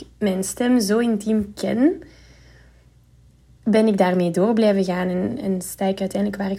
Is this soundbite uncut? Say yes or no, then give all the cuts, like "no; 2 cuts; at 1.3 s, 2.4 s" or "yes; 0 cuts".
yes; 0 cuts